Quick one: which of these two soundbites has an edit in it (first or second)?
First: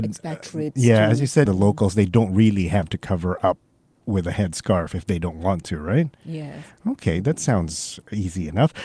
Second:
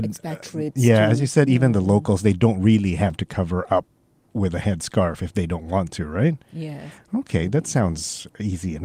first